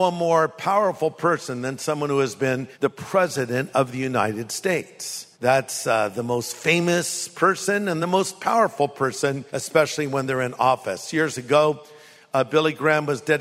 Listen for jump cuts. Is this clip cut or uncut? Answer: cut